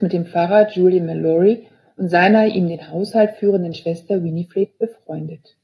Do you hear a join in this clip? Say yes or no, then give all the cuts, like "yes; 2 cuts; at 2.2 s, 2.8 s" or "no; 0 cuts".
no; 0 cuts